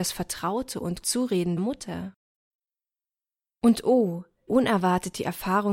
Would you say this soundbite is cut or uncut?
cut